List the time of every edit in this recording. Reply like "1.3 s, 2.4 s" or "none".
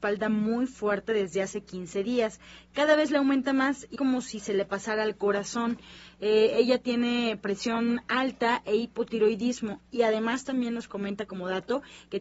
4.0 s